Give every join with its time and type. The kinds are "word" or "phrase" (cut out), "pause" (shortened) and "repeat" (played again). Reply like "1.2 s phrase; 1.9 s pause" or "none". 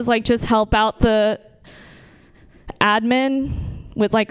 none